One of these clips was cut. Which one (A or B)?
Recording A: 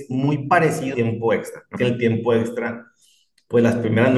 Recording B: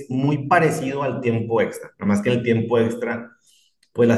A